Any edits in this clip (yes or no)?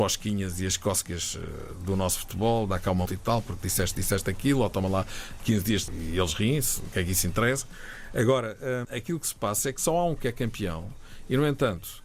yes